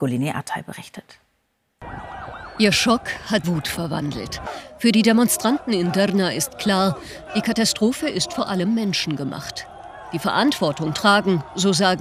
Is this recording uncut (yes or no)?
no